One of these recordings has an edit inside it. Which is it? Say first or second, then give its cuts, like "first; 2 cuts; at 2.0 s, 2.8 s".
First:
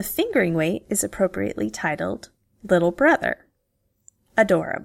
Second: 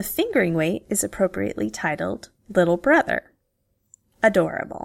second; 1 cut; at 2.4 s